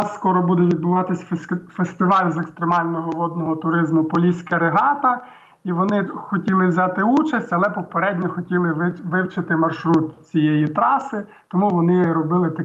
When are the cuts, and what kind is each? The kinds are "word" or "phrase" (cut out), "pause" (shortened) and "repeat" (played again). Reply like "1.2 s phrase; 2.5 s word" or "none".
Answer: 6.1 s word